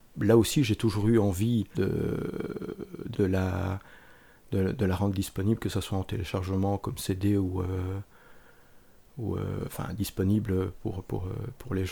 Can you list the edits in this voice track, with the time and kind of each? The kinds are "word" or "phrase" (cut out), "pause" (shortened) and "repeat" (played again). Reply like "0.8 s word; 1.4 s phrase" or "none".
1.7 s word; 3.1 s phrase